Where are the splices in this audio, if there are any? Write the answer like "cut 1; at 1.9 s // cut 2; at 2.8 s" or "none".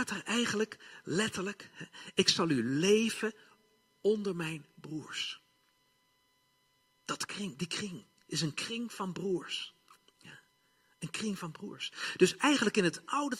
none